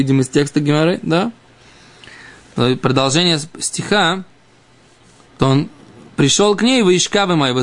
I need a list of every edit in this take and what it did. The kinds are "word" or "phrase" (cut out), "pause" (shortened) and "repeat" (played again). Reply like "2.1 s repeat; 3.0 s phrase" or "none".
5.4 s word

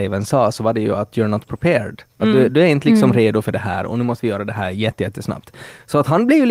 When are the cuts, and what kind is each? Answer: 1.1 s word

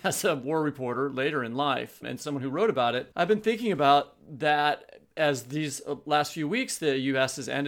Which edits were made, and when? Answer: 2.0 s word

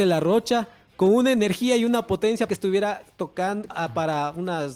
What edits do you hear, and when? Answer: 2.5 s word; 3.7 s word

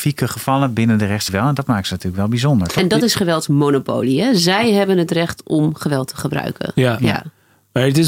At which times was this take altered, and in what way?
1.3 s word

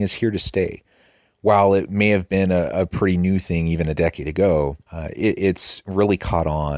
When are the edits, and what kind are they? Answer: 4.8 s pause

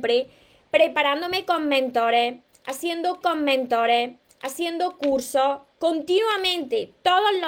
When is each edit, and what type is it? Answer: 3.2 s repeat

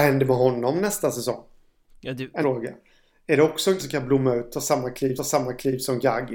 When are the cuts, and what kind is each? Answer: 1.9 s pause; 2.4 s word; 3.8 s word; 5.2 s repeat

